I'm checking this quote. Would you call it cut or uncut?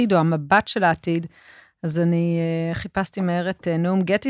uncut